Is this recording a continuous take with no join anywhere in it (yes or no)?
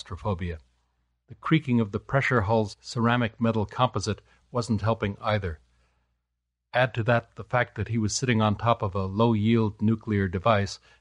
yes